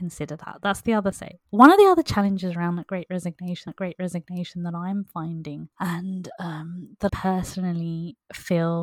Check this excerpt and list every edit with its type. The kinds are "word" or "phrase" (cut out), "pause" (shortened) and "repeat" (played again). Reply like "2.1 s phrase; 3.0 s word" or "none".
1.1 s phrase; 3.7 s repeat; 5.7 s pause; 7.1 s word